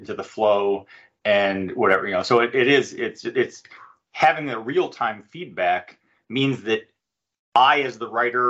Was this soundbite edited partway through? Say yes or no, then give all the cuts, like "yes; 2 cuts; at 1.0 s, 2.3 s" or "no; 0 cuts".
no; 0 cuts